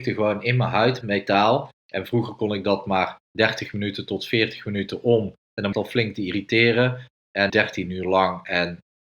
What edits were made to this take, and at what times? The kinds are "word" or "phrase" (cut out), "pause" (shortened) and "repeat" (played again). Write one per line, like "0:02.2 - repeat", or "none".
0:01.0 - word
0:01.8 - pause
0:03.2 - pause
0:05.7 - phrase
0:07.5 - word